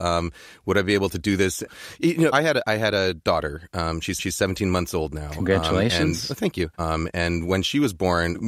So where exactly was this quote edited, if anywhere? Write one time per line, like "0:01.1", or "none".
0:02.3
0:04.2
0:06.7